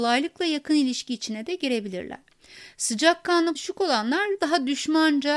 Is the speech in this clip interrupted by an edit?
yes; 2 cuts; at 3.6 s, 4.4 s

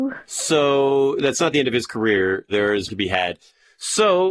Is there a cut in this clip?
yes; 1 cut; at 2.9 s

